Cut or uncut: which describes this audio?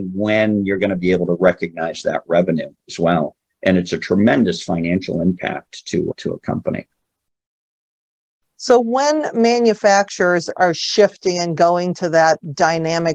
uncut